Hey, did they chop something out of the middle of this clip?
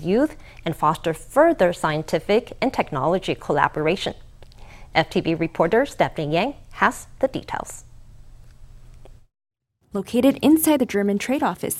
no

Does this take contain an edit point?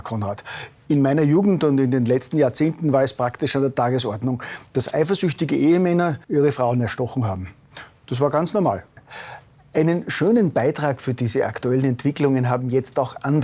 yes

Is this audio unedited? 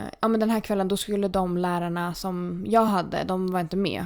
yes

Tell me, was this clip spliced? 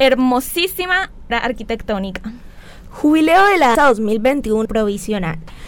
yes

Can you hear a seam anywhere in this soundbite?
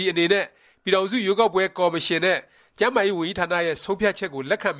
no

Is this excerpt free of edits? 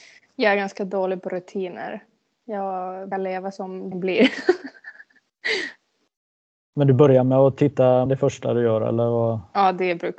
no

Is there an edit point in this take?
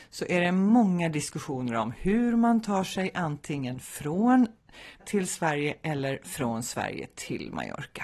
yes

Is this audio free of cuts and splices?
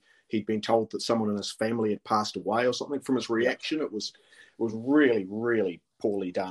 yes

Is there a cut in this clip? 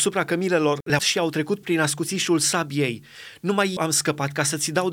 yes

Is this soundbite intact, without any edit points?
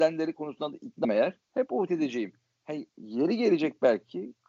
no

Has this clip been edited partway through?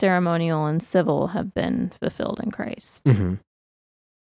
no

